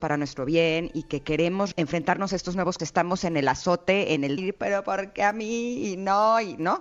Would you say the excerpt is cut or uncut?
cut